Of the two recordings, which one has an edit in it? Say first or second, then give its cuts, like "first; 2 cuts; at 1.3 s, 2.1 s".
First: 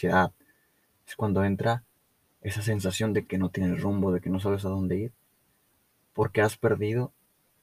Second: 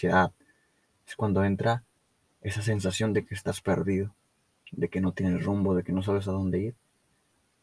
first; 1 cut; at 3.3 s